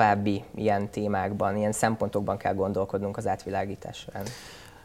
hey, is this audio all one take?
yes; 0 cuts

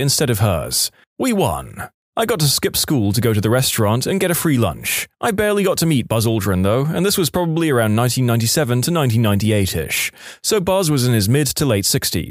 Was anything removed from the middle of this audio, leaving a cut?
yes; 1 cut; at 5.1 s

